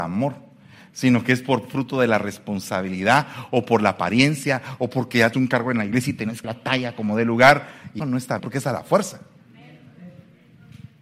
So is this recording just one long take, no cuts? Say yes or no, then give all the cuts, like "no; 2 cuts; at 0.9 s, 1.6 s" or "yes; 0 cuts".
no; 4 cuts; at 5.3 s, 6.4 s, 8.0 s, 8.4 s